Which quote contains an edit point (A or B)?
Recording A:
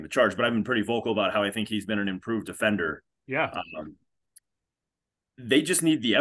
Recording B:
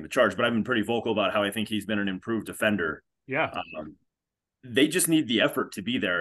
B